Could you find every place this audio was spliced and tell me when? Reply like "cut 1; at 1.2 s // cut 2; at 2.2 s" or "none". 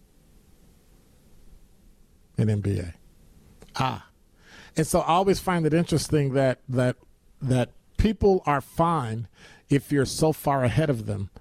none